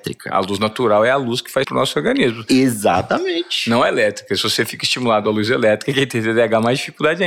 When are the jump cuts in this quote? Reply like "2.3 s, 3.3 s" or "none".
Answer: 1.6 s